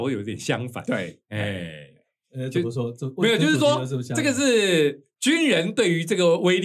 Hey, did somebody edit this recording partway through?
no; 0 cuts

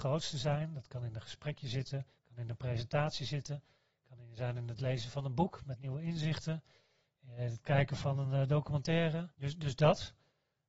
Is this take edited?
no; 0 cuts

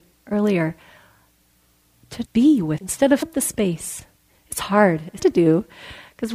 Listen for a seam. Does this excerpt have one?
yes; 4 cuts; at 2.3 s, 2.8 s, 3.2 s, 5.2 s

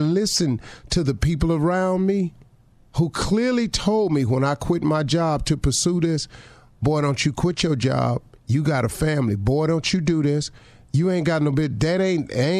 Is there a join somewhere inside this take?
no; 0 cuts

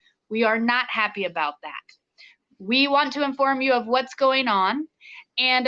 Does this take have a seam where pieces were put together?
no; 0 cuts

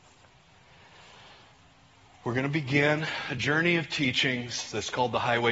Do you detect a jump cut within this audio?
no; 0 cuts

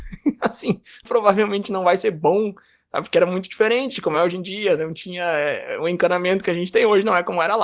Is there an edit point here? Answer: no; 0 cuts

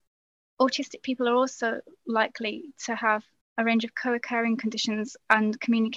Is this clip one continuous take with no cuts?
yes; 0 cuts

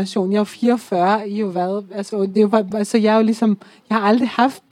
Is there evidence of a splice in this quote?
no; 0 cuts

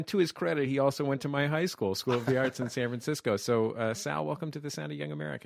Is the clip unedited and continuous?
yes; 0 cuts

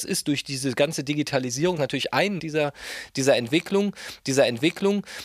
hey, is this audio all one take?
no; 3 cuts; at 1.8 s, 2.4 s, 4.2 s

